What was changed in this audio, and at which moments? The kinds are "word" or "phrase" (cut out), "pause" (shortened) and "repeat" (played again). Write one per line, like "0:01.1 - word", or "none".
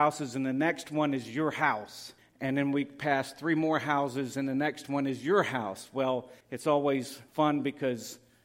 0:02.2 - pause
0:06.4 - pause
0:07.3 - pause

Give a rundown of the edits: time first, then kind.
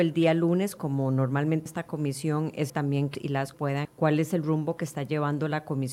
0:01.7 - word
0:02.7 - word
0:03.1 - word
0:03.5 - word
0:03.8 - word

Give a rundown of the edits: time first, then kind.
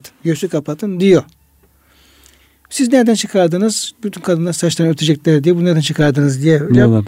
none

